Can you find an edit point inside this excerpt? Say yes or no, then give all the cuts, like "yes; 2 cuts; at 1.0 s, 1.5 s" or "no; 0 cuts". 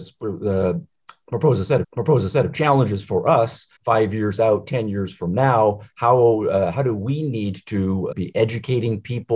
yes; 3 cuts; at 1.8 s, 3.8 s, 8.1 s